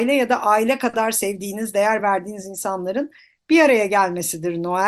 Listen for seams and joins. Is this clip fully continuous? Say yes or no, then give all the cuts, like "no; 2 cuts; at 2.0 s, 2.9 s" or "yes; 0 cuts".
yes; 0 cuts